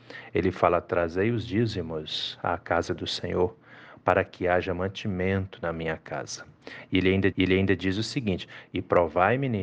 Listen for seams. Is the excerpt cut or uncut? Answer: cut